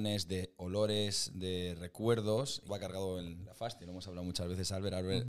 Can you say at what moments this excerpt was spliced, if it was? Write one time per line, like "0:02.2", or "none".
0:02.7